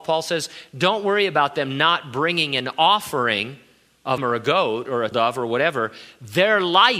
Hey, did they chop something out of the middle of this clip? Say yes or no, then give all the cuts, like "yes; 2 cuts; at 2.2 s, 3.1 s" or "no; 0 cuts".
yes; 2 cuts; at 4.2 s, 5.1 s